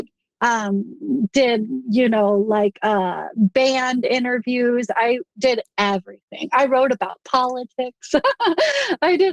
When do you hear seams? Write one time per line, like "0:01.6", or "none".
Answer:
none